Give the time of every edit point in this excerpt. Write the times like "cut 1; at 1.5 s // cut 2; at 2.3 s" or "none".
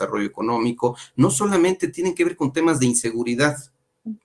none